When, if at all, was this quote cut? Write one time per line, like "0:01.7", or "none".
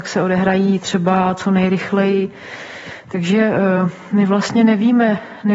none